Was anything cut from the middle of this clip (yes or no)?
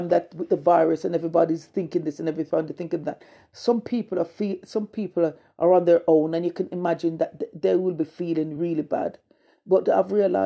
no